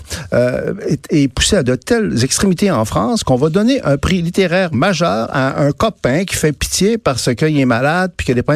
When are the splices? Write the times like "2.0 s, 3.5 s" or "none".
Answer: none